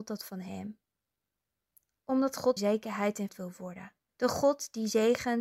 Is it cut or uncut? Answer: cut